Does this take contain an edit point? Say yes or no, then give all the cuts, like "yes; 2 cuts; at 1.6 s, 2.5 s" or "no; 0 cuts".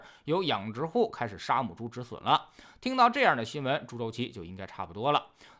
no; 0 cuts